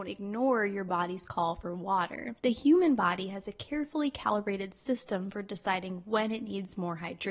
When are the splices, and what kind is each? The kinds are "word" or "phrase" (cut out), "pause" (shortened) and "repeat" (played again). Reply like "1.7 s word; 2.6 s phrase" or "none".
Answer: 2.4 s pause